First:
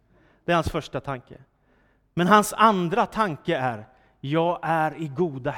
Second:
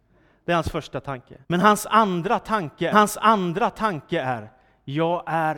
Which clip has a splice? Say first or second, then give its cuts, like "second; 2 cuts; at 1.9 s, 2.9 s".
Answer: second; 2 cuts; at 1.4 s, 2.9 s